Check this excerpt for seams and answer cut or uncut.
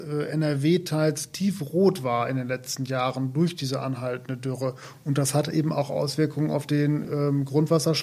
uncut